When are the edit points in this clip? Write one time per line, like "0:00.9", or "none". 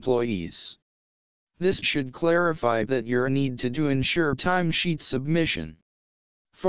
0:01.8
0:02.9
0:03.2
0:03.7
0:04.4